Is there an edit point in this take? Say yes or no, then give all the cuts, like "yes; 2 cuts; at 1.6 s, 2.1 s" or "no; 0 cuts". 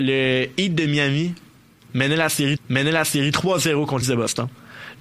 yes; 2 cuts; at 2.6 s, 4.0 s